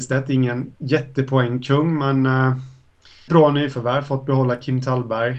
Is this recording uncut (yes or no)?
no